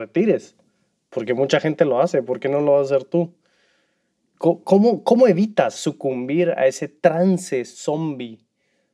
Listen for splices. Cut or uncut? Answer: uncut